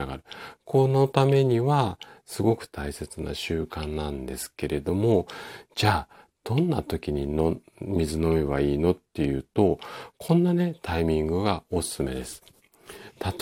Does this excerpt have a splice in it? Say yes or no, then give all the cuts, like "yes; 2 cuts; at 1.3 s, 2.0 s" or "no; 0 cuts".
no; 0 cuts